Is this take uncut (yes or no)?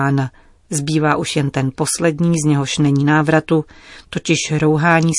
yes